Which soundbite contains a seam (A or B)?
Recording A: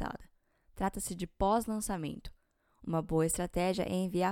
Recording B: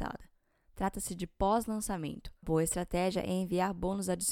B